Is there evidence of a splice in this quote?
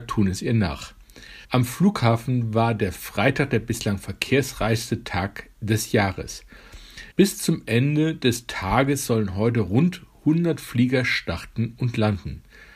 yes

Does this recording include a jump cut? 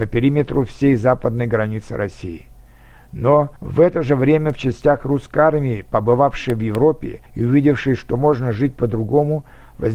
yes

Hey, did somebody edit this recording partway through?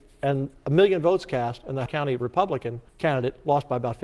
yes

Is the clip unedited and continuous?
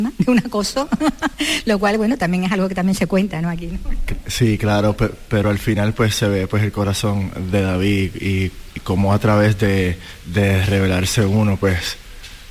yes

